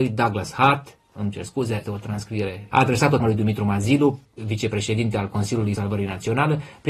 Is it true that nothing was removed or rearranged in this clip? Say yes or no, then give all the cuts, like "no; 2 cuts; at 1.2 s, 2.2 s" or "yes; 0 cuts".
no; 6 cuts; at 1.0 s, 1.8 s, 2.7 s, 3.2 s, 4.4 s, 5.7 s